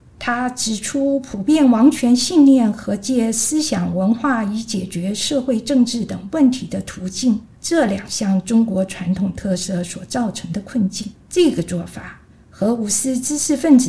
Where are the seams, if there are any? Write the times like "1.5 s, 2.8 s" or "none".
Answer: 7.6 s, 11.2 s